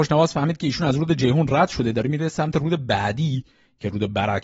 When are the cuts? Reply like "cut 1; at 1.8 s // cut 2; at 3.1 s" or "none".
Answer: none